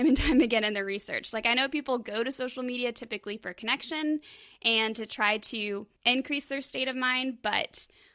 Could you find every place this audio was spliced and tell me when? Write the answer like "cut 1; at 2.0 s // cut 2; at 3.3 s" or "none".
cut 1; at 5.9 s